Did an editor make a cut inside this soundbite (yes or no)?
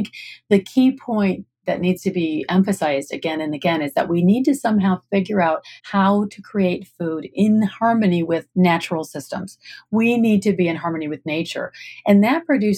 yes